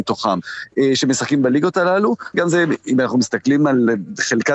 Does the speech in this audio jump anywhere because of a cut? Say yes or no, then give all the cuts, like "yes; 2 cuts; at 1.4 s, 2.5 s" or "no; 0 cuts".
yes; 1 cut; at 2.3 s